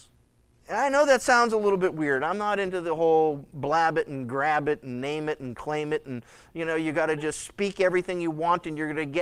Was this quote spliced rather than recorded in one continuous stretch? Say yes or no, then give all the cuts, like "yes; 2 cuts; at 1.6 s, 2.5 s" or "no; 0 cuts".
no; 0 cuts